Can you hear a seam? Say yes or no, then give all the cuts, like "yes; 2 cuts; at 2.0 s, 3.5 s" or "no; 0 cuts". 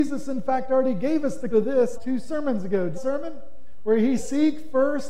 yes; 4 cuts; at 1.5 s, 1.9 s, 2.9 s, 4.2 s